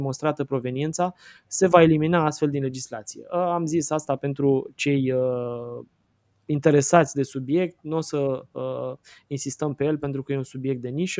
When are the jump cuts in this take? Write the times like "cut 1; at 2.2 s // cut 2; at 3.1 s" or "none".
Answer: none